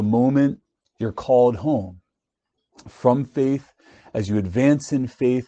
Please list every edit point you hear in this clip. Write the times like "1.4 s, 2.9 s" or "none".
none